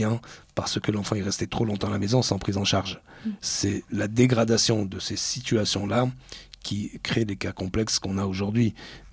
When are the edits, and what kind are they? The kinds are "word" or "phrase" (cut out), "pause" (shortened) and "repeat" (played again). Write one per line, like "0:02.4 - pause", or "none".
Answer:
none

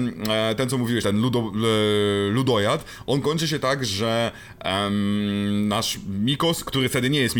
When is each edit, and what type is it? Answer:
0:01.0 - word

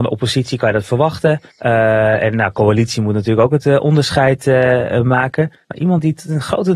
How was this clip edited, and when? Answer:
0:01.5 - pause
0:05.6 - pause

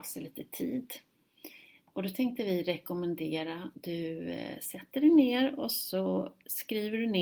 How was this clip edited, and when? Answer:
0:01.9 - word
0:03.7 - word

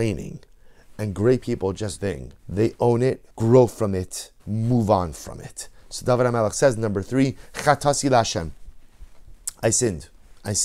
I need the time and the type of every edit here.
0:02.0 - phrase
0:02.4 - pause
0:03.3 - pause
0:04.4 - pause

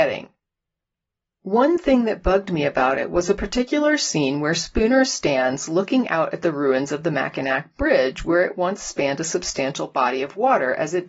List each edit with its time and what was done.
none

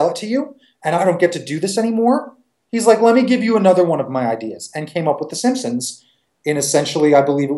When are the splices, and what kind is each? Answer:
none

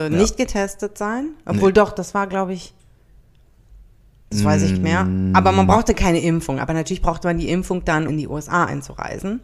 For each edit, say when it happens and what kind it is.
0:04.8 - phrase
0:08.1 - word

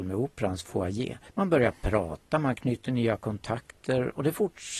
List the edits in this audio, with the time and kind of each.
0:01.3 - pause

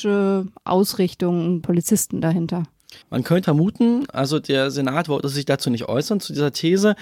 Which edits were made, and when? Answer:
0:01.6 - phrase
0:03.0 - pause
0:03.4 - word

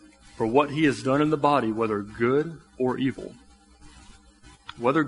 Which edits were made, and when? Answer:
0:02.7 - pause

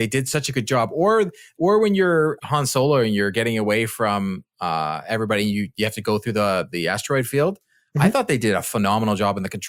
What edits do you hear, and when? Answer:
0:02.4 - word

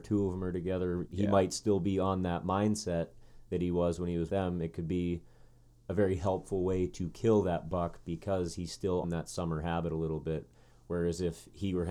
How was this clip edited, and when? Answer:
0:01.1 - word
0:04.3 - word
0:09.0 - word

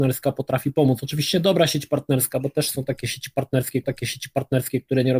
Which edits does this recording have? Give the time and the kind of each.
0:03.8 - repeat

